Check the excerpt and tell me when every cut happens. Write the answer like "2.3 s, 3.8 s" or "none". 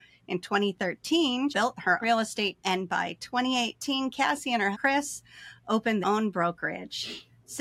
1.5 s, 2.0 s, 2.6 s, 4.7 s, 6.0 s

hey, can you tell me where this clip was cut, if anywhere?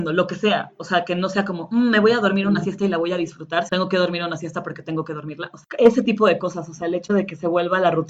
3.7 s

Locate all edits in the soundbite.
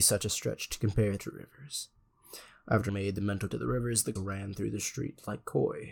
1.2 s, 2.9 s, 3.5 s, 4.2 s

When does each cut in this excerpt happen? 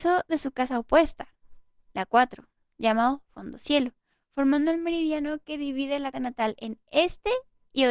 6.1 s

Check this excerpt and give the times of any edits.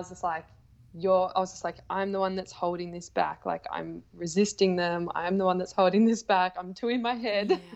none

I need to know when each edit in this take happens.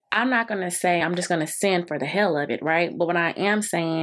none

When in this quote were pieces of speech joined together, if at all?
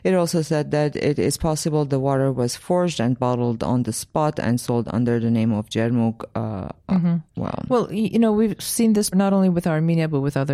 7.3 s, 9.1 s

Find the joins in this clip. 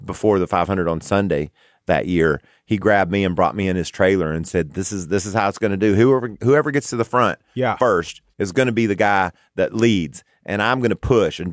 8.3 s

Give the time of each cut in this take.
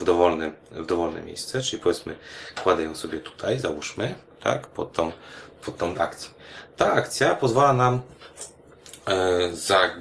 6.0 s

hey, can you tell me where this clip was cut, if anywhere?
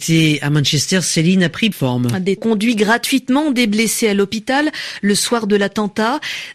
1.7 s, 2.4 s

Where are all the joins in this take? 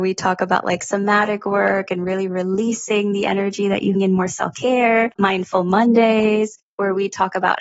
3.9 s, 5.2 s

